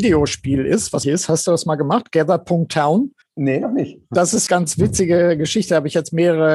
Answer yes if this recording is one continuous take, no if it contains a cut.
no